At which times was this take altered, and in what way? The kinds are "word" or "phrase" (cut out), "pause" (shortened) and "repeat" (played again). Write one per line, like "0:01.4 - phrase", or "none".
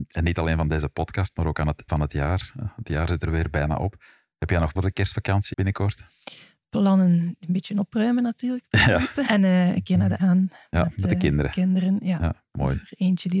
0:01.9 - word
0:04.8 - word
0:05.5 - word
0:09.3 - word
0:10.2 - word